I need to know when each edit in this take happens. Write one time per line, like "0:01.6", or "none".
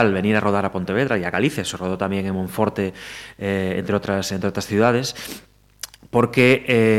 none